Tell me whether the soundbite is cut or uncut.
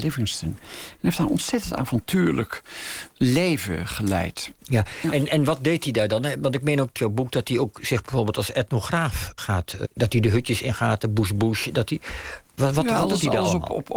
cut